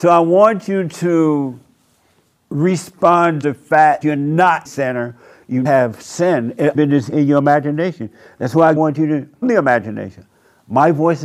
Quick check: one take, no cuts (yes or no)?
no